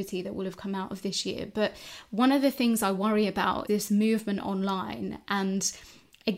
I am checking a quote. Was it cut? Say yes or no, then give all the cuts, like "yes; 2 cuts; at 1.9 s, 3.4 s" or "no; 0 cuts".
yes; 1 cut; at 3.7 s